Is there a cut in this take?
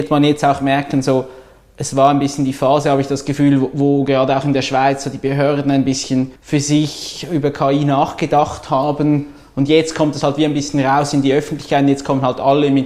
yes; 1 cut; at 6.4 s

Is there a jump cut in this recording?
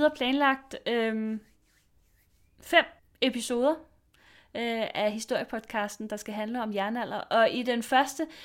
yes; 1 cut; at 3.0 s

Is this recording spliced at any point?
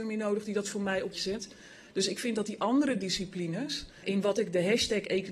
yes; 2 cuts; at 1.1 s, 4.0 s

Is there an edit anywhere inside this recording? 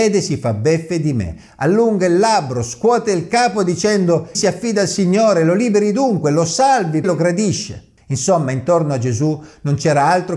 yes; 2 cuts; at 4.3 s, 7.0 s

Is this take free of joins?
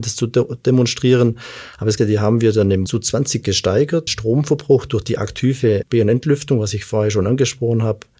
no; 5 cuts; at 2.0 s, 2.9 s, 3.4 s, 4.1 s, 5.8 s

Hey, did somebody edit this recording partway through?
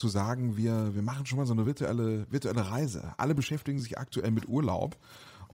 no; 0 cuts

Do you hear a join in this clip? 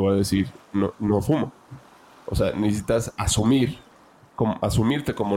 no; 0 cuts

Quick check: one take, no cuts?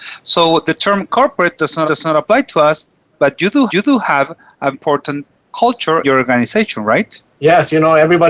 no; 5 cuts; at 1.8 s, 3.7 s, 4.7 s, 6.0 s, 7.3 s

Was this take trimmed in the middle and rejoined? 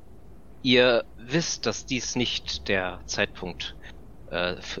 no; 0 cuts

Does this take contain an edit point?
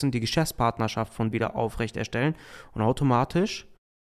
yes; 1 cut; at 1.3 s

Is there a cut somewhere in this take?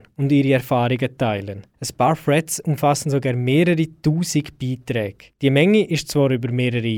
yes; 1 cut; at 1.7 s

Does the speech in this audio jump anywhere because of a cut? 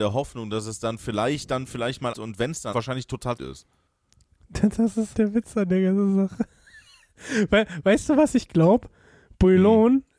yes; 4 cuts; at 2.1 s, 2.7 s, 3.4 s, 5.1 s

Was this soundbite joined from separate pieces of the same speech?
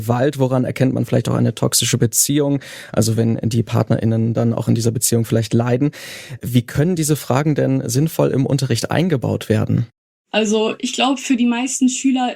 no; 0 cuts

